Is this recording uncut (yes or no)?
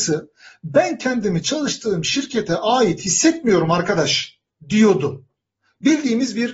yes